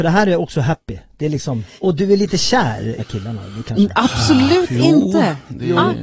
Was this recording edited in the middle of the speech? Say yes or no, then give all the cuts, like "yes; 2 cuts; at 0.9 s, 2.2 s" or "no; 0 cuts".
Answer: yes; 2 cuts; at 1.8 s, 3.0 s